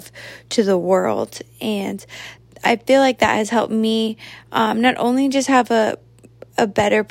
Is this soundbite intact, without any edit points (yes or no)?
yes